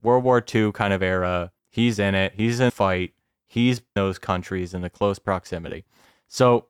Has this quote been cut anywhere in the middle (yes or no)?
yes